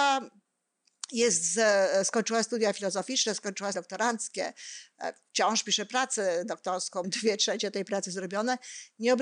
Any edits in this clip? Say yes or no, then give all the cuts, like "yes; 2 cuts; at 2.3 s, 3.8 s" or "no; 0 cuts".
yes; 2 cuts; at 3.7 s, 7.0 s